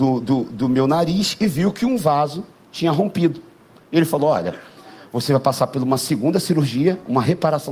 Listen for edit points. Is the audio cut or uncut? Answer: uncut